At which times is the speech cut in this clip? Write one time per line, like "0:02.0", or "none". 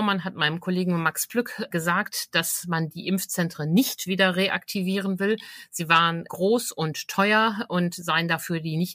none